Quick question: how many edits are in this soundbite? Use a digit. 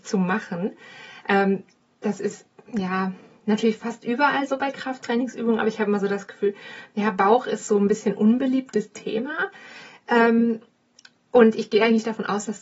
0